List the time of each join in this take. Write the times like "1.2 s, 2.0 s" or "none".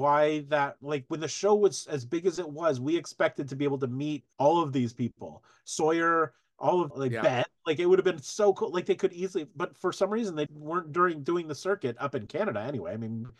4.3 s, 6.9 s, 10.5 s